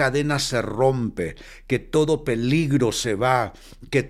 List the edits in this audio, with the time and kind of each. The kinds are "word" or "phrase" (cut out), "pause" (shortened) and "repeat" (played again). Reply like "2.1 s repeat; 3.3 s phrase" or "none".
none